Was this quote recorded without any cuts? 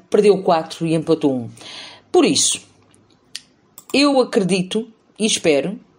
yes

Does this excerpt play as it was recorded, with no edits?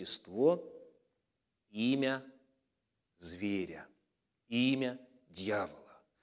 yes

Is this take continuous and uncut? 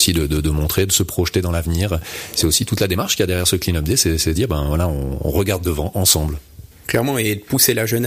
no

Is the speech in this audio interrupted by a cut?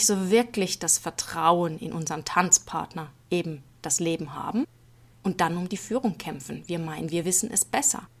no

